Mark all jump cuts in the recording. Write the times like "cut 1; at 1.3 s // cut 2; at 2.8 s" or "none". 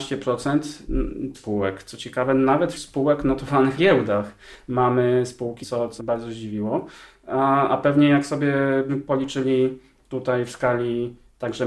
cut 1; at 1.3 s // cut 2; at 2.7 s // cut 3; at 3.8 s // cut 4; at 5.6 s // cut 5; at 6.0 s // cut 6; at 8.9 s